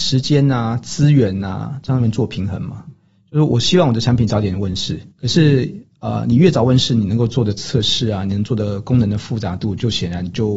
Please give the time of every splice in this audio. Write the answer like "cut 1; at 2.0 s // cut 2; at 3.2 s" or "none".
cut 1; at 5.1 s